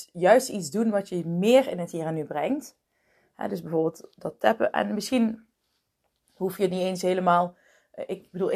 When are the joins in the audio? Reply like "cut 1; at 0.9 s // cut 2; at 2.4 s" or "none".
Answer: none